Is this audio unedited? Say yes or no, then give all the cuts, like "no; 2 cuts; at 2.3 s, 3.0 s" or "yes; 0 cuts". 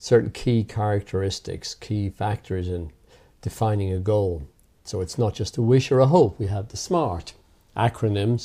yes; 0 cuts